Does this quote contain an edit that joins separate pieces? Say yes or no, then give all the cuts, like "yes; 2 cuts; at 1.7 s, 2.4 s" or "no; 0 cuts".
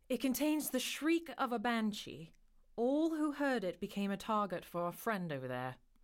no; 0 cuts